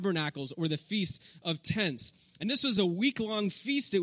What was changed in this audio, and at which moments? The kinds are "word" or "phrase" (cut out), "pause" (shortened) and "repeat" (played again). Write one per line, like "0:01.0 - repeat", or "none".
none